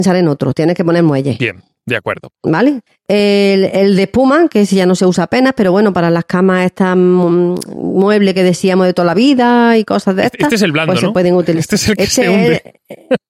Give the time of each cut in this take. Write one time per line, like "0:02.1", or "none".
0:02.9